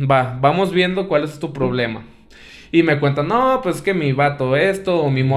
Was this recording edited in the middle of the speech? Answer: no; 0 cuts

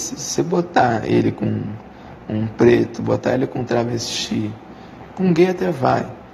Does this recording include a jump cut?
no; 0 cuts

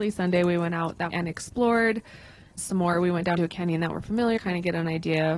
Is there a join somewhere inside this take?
yes; 4 cuts; at 1.1 s, 2.6 s, 3.4 s, 4.4 s

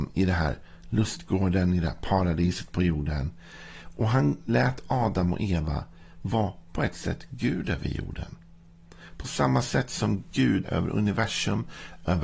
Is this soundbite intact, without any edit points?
no; 1 cut; at 10.6 s

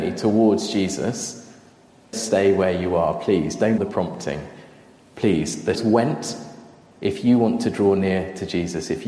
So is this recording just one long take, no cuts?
no; 3 cuts; at 2.1 s, 3.8 s, 5.7 s

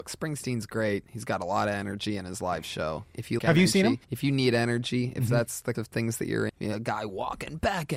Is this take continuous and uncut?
no; 4 cuts; at 3.4 s, 4.0 s, 5.7 s, 6.5 s

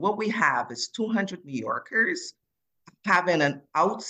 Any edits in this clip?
no; 0 cuts

